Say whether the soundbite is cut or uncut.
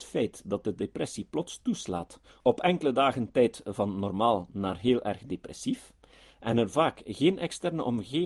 uncut